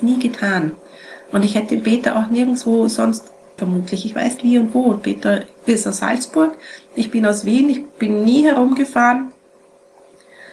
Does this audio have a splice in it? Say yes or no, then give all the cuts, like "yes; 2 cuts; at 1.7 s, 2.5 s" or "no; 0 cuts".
yes; 3 cuts; at 3.6 s, 4.4 s, 5.5 s